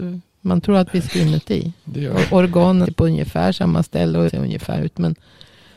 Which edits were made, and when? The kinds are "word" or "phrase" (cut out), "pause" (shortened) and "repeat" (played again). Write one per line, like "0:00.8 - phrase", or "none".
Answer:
0:01.1 - phrase
0:02.8 - word
0:04.3 - word
0:04.7 - word